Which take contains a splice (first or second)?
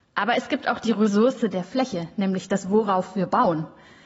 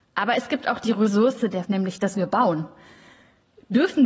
second